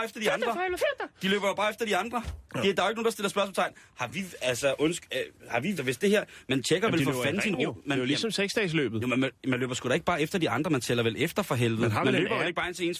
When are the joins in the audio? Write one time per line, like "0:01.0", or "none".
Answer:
0:02.4
0:05.8